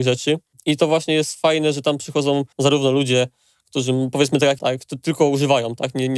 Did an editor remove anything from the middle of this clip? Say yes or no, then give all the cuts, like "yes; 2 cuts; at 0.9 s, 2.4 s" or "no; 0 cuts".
yes; 2 cuts; at 2.5 s, 4.6 s